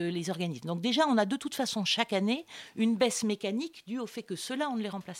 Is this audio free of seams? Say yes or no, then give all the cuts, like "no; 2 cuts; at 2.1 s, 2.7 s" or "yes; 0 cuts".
yes; 0 cuts